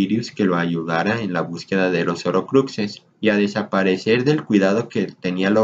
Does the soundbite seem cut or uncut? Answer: cut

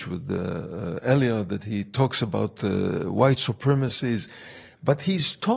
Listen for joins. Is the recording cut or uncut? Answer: uncut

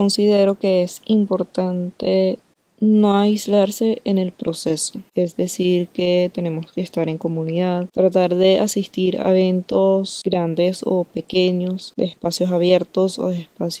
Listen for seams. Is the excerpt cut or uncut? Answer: uncut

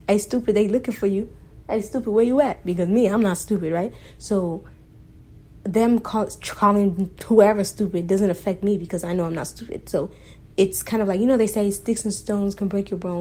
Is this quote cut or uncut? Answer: uncut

